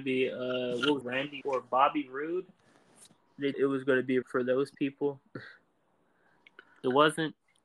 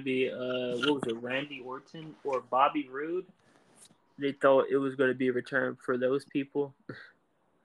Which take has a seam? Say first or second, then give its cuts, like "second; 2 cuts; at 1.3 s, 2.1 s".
first; 4 cuts; at 1.0 s, 1.4 s, 3.5 s, 4.2 s